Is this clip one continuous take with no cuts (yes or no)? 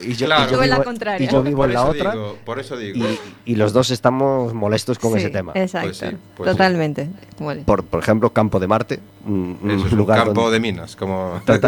yes